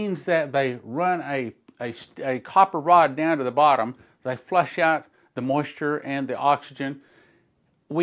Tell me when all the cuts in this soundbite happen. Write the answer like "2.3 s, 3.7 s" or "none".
none